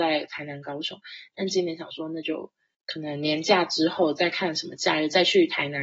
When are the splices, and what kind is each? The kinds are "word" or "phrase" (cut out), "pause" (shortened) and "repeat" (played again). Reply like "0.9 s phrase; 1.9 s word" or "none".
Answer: 2.7 s pause